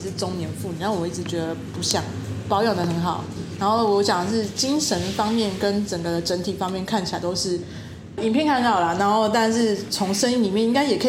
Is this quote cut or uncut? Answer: cut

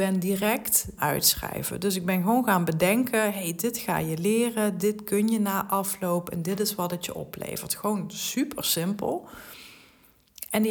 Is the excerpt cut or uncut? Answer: cut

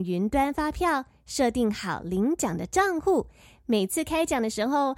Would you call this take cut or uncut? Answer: uncut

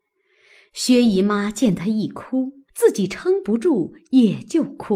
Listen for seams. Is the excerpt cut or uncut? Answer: cut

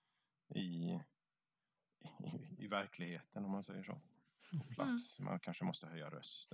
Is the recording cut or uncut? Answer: uncut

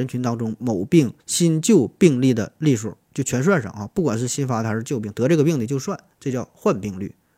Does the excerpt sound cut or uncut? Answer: cut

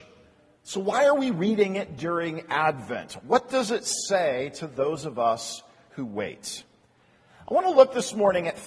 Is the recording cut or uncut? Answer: uncut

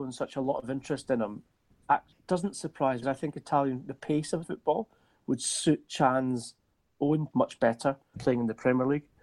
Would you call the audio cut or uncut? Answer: cut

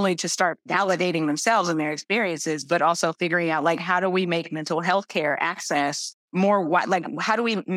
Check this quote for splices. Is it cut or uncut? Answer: cut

